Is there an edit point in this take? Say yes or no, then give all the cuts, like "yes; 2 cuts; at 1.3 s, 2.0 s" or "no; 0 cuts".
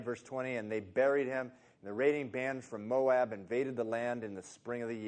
no; 0 cuts